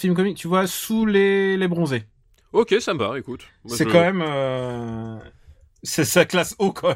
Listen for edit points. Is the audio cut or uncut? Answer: uncut